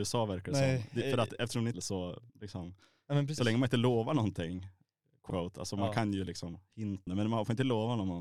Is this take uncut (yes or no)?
no